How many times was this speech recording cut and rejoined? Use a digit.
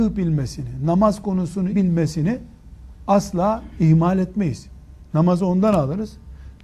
1